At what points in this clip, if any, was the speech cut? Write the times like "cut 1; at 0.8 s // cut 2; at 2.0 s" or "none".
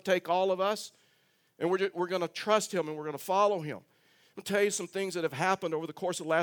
none